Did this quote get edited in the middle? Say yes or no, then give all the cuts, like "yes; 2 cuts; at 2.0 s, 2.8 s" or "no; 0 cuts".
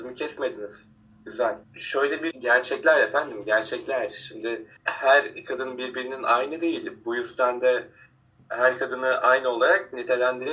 yes; 3 cuts; at 1.6 s, 2.3 s, 4.8 s